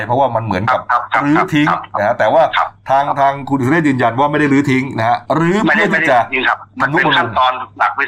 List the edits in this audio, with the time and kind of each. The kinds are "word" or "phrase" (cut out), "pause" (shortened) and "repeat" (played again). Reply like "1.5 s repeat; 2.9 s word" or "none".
5.2 s pause